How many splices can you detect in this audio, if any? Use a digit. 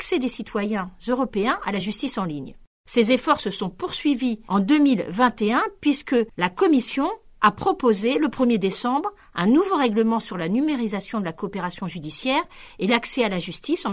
0